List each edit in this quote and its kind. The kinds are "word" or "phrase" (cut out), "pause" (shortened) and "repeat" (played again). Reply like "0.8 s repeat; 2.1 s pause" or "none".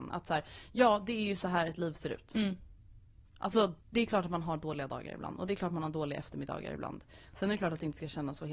3.8 s pause